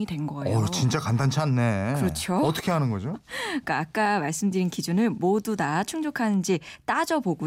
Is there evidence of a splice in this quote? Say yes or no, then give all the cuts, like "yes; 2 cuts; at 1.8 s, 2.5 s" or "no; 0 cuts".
no; 0 cuts